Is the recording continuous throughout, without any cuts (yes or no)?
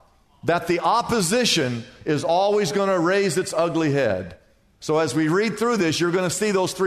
yes